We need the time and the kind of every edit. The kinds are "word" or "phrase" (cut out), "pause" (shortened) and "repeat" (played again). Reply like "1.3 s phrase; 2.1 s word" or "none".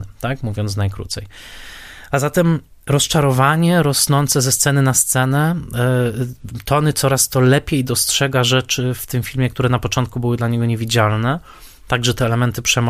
none